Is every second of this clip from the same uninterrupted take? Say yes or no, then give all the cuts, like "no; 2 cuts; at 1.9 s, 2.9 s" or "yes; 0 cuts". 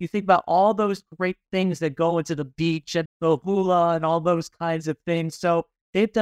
no; 1 cut; at 3.0 s